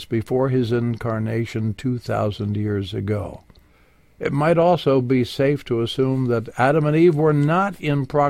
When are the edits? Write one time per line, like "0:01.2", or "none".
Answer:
none